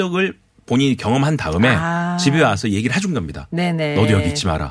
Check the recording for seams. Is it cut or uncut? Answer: uncut